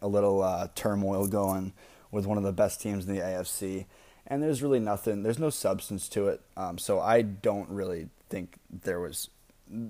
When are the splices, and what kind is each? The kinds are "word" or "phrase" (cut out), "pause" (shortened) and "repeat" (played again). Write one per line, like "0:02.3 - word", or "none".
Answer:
none

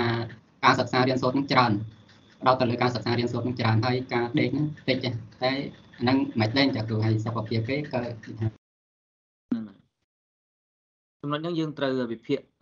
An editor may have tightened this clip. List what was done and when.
none

